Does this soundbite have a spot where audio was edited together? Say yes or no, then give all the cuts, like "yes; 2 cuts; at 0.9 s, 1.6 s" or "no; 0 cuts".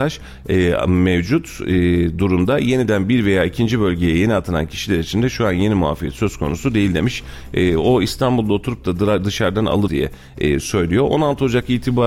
yes; 1 cut; at 9.9 s